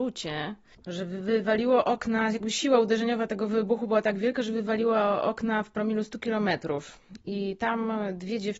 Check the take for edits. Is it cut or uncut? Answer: uncut